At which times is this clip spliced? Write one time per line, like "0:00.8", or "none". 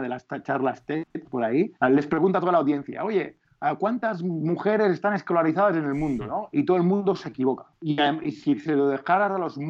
0:01.2
0:01.8